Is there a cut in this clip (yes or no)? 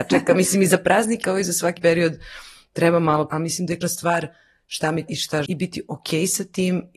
yes